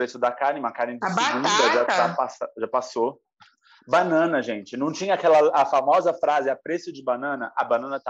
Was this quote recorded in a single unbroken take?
yes; 0 cuts

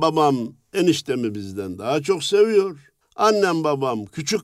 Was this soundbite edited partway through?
yes; 1 cut; at 3.0 s

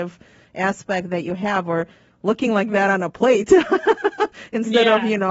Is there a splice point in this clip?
no; 0 cuts

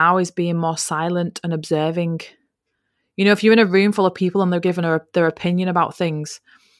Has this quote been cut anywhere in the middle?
no; 0 cuts

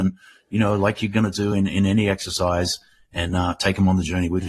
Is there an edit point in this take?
no; 0 cuts

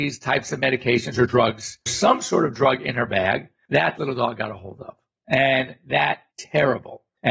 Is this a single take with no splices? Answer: no; 3 cuts; at 1.9 s, 4.0 s, 6.3 s

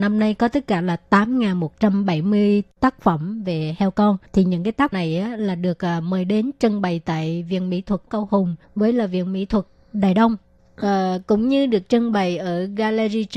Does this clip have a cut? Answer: yes; 4 cuts; at 4.3 s, 4.9 s, 8.1 s, 8.6 s

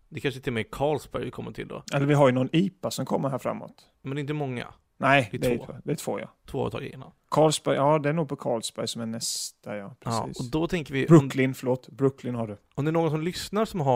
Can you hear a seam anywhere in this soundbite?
yes; 1 cut; at 1.8 s

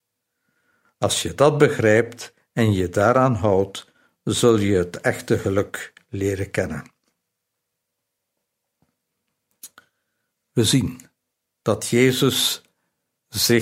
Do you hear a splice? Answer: no; 0 cuts

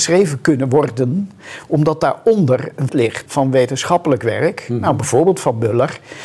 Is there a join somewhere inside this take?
yes; 2 cuts; at 2.9 s, 3.3 s

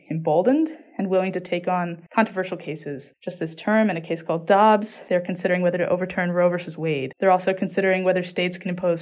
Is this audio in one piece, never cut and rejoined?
yes; 0 cuts

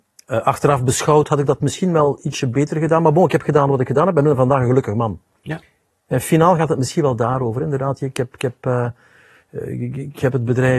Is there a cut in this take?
no; 0 cuts

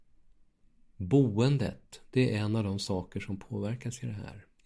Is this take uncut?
yes; 0 cuts

